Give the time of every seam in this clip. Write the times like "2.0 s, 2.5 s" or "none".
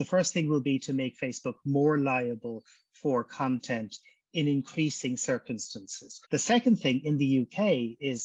6.2 s